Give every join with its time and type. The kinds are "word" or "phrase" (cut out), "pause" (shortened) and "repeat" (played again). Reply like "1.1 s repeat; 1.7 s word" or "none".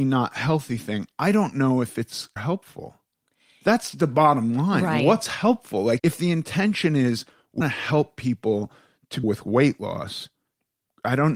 2.4 s word; 6.0 s word; 7.6 s word; 9.2 s word

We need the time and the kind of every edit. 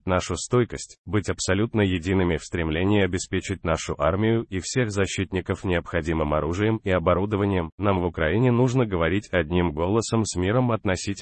none

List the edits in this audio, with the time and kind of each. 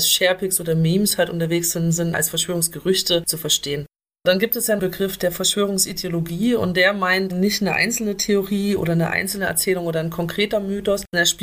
2.1 s phrase; 4.8 s phrase; 7.3 s word

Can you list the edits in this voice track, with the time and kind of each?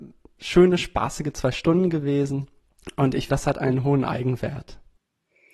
3.3 s word

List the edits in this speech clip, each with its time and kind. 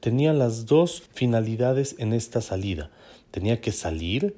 1.1 s pause

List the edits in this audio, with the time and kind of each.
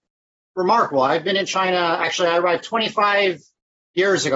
none

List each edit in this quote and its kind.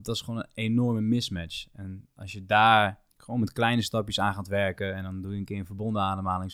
3.1 s pause

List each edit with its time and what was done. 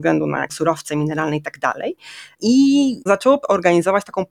none

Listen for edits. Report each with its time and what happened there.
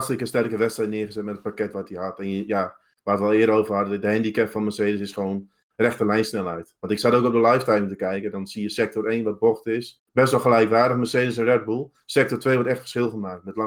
none

